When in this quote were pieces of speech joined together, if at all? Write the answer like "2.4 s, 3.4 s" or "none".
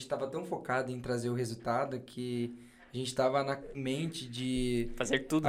3.7 s